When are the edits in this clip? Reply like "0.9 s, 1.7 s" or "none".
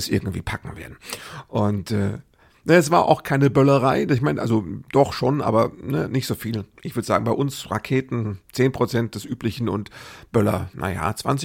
8.4 s